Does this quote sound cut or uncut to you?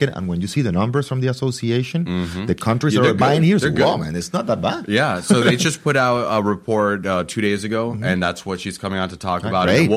uncut